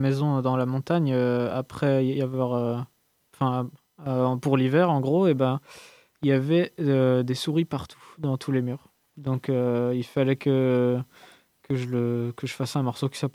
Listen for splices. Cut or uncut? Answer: uncut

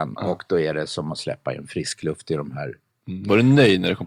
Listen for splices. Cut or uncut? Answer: uncut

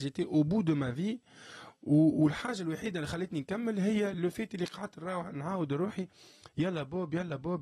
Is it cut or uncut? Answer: uncut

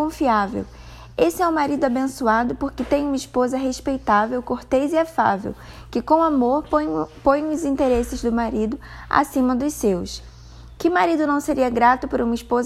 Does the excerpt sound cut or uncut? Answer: uncut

